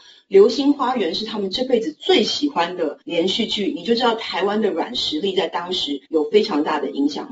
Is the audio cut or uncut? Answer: cut